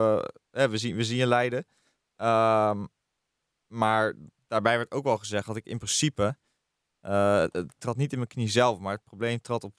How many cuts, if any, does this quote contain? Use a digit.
1